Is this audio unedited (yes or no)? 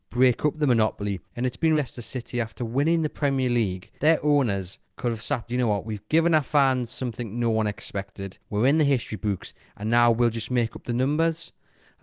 no